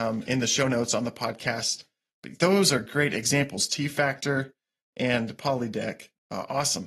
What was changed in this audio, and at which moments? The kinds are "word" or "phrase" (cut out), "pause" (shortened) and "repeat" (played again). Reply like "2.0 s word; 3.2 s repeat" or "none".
none